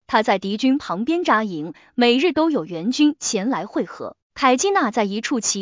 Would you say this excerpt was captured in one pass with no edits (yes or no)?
no